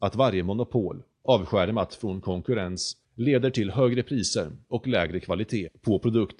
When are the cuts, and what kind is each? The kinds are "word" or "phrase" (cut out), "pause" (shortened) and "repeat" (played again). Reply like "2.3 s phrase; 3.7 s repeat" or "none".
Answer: 3.0 s pause